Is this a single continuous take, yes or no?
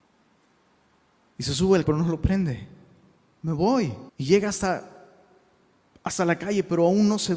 no